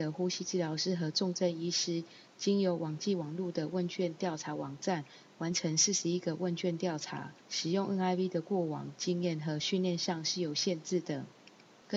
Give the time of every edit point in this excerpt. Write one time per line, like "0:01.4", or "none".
0:07.4